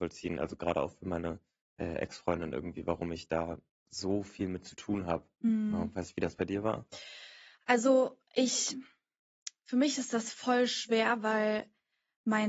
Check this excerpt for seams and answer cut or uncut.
uncut